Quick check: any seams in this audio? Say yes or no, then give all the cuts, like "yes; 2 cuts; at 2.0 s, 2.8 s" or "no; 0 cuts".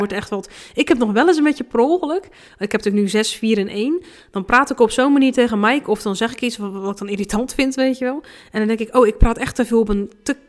no; 0 cuts